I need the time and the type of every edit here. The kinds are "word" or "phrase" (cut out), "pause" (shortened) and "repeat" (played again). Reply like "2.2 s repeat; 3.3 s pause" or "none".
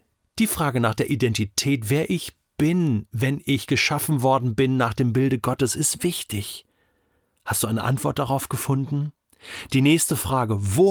none